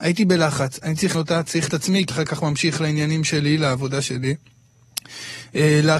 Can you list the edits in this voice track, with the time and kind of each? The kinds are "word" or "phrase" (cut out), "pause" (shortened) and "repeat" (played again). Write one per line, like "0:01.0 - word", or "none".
0:01.1 - word
0:01.7 - word
0:02.1 - word

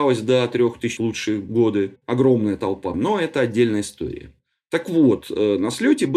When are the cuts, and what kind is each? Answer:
0:01.0 - word
0:02.9 - phrase

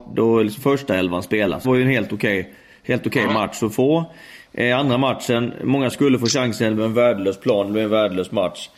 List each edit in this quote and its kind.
0:01.6 - word
0:05.9 - word
0:06.8 - word

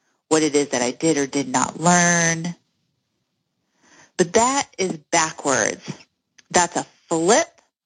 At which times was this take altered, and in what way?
none

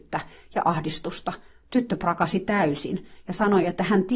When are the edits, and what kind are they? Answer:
none

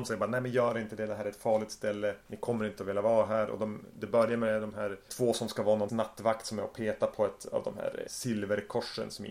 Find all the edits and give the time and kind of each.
0:05.1 - word
0:05.9 - word
0:08.1 - word

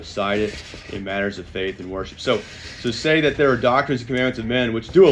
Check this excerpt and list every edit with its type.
none

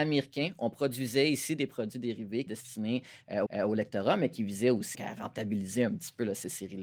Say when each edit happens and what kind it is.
0:02.5 - word
0:03.5 - repeat
0:04.9 - word

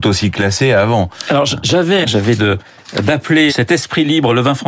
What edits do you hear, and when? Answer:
0:02.0 - word
0:02.4 - word
0:03.5 - word

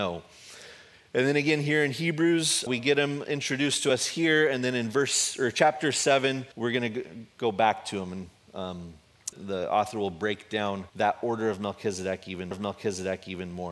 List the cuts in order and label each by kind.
0:02.7 - word
0:06.5 - pause
0:09.3 - word
0:10.9 - pause
0:12.5 - repeat

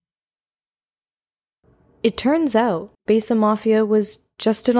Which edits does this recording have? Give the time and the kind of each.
0:02.9 - pause

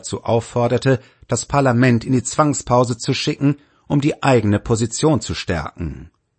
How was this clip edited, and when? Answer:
none

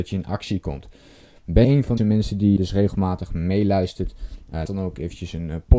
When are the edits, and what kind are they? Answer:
0:01.6 - word
0:02.0 - word
0:02.6 - word
0:04.6 - word

